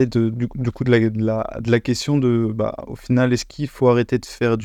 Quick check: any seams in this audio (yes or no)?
no